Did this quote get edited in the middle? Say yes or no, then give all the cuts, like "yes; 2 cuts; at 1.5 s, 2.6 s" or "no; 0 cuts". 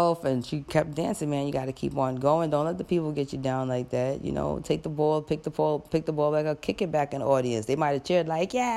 no; 0 cuts